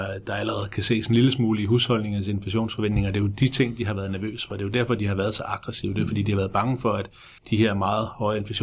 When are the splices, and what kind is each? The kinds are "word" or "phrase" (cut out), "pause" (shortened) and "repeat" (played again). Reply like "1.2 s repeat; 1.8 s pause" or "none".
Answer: 7.4 s pause